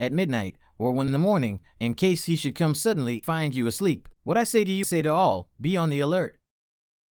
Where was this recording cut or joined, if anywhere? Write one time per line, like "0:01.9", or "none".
0:01.1
0:03.2
0:04.1
0:04.8